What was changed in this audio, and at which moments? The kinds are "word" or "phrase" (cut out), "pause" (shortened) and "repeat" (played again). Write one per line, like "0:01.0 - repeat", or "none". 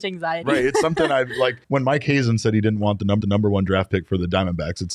0:01.6 - pause
0:03.2 - repeat